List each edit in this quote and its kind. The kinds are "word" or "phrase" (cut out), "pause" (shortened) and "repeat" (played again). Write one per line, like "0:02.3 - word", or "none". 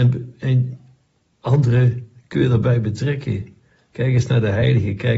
none